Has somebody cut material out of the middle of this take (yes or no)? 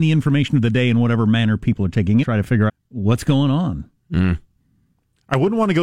yes